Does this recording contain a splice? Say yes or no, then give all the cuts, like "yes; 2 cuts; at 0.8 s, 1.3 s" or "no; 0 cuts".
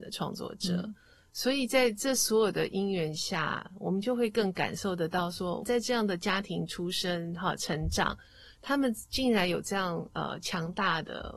yes; 1 cut; at 5.6 s